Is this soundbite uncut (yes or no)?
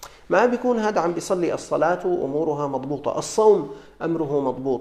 yes